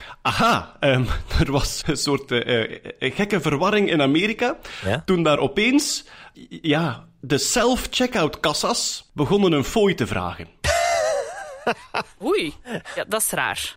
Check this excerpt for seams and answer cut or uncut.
cut